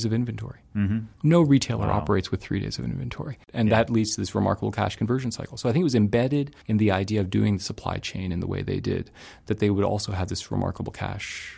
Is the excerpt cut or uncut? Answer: cut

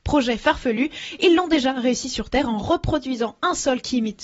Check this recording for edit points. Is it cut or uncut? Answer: uncut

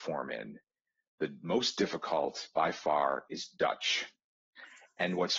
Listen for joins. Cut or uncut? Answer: uncut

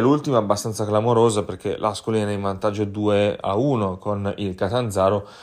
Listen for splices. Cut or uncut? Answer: uncut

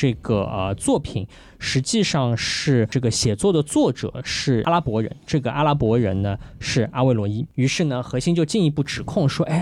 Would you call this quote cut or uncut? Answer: uncut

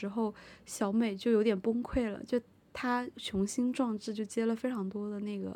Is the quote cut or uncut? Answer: uncut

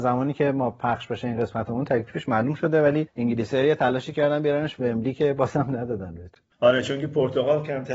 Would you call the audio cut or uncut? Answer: uncut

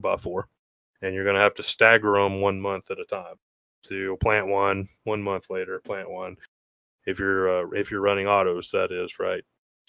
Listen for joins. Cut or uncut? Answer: uncut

